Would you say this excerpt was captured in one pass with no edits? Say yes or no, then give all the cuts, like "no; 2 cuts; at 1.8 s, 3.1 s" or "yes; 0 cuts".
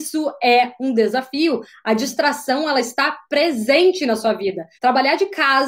no; 1 cut; at 4.7 s